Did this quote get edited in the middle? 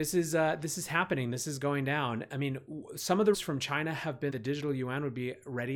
yes; 2 cuts; at 3.3 s, 4.3 s

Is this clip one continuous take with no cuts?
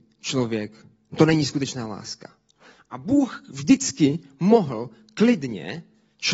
yes; 0 cuts

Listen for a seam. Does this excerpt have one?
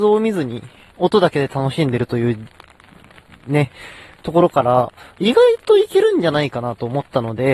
no; 0 cuts

